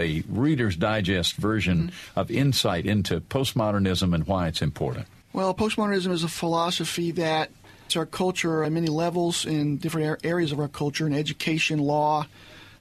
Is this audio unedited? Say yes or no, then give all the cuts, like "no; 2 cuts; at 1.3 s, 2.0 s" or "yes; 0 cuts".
no; 3 cuts; at 5.2 s, 7.9 s, 8.6 s